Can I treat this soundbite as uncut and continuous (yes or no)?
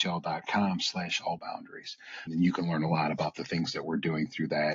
no